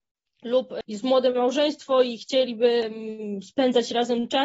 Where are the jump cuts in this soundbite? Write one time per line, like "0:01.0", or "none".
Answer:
none